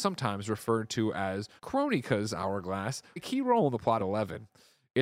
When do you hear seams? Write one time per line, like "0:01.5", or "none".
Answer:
0:01.6
0:03.2
0:04.0